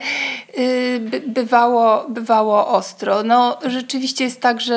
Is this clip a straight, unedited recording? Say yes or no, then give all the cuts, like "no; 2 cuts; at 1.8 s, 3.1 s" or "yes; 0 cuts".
yes; 0 cuts